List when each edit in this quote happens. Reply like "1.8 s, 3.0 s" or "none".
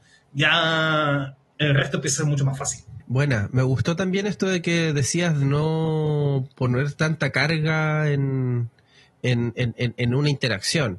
5.4 s